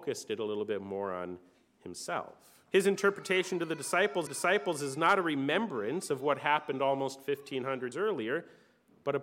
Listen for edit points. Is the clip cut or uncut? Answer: cut